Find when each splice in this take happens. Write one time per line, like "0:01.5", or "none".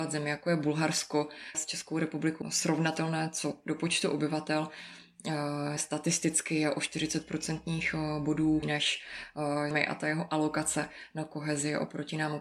0:01.5
0:02.4
0:05.8
0:08.6
0:09.7